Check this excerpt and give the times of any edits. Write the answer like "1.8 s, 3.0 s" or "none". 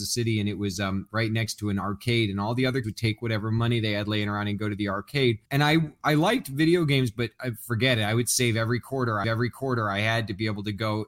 2.8 s, 5.4 s, 9.2 s